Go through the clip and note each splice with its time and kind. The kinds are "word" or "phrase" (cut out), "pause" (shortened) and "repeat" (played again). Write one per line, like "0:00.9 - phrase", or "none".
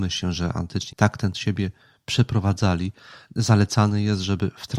0:00.9 - word
0:01.3 - word